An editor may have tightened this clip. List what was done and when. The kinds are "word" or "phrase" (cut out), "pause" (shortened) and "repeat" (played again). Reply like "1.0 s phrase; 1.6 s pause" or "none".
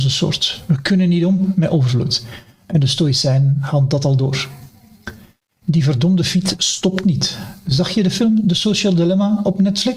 none